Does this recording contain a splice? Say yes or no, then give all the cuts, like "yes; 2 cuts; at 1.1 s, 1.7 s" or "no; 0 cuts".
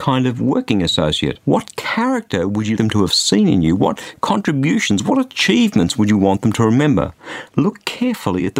yes; 3 cuts; at 1.4 s, 2.8 s, 7.5 s